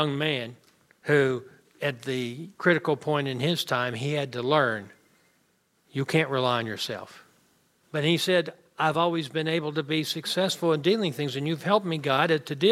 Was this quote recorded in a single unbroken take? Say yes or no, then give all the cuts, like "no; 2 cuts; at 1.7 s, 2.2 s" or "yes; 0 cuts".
yes; 0 cuts